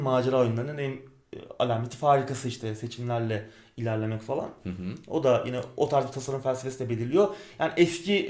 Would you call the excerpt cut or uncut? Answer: uncut